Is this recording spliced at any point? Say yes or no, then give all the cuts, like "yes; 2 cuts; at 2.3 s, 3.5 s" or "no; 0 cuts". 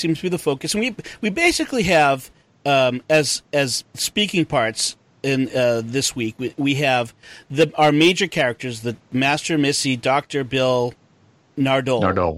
no; 0 cuts